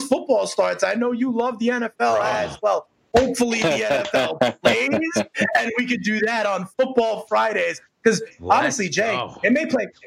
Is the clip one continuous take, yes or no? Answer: yes